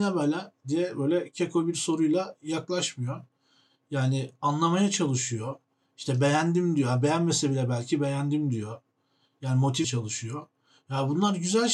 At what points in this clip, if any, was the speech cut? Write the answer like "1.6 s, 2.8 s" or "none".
9.8 s